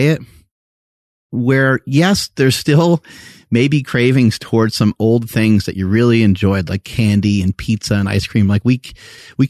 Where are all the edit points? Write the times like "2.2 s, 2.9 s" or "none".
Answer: none

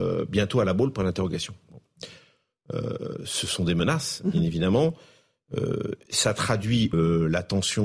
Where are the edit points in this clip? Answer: 6.9 s

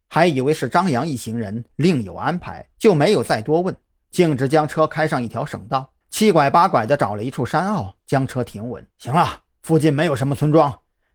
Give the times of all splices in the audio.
2.7 s, 6.0 s, 8.9 s

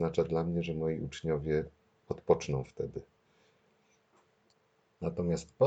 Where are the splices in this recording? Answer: none

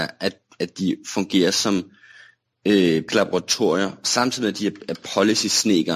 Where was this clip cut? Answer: 3.1 s

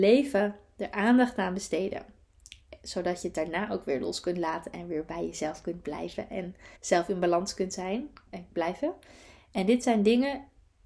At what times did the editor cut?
6.8 s, 8.3 s

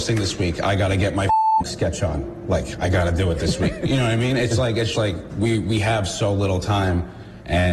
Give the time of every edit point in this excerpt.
1.6 s, 4.5 s, 4.9 s

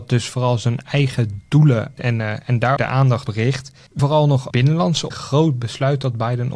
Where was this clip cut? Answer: 2.0 s, 2.8 s, 3.3 s, 4.0 s, 4.5 s, 5.1 s

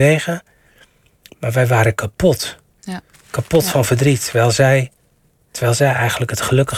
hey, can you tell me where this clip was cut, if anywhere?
3.1 s

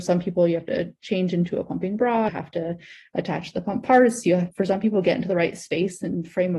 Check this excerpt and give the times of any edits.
2.3 s, 4.5 s

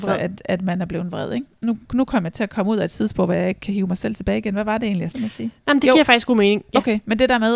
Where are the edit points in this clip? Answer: 5.1 s

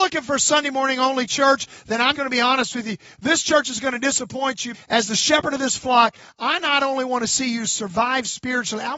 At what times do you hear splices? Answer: 2.2 s, 4.7 s

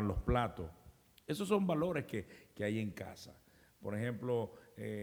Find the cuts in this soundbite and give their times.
none

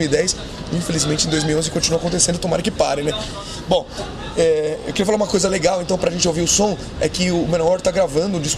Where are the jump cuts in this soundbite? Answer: none

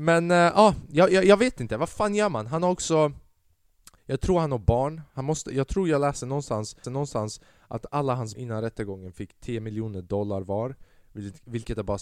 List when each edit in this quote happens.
4.0 s, 6.8 s, 8.4 s

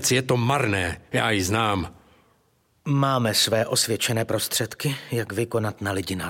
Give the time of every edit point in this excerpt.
none

